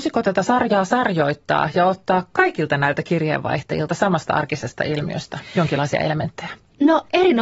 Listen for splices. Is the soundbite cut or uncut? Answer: uncut